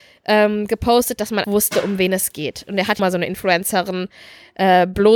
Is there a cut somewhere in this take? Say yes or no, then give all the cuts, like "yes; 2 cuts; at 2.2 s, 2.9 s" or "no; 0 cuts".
yes; 2 cuts; at 1.4 s, 3.0 s